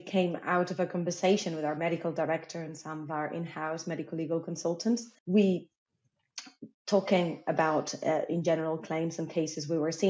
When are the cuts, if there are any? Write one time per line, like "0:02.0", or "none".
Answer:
0:05.2